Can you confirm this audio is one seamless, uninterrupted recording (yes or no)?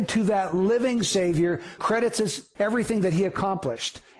no